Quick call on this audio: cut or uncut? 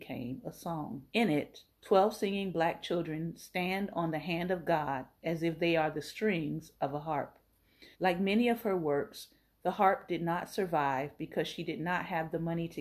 cut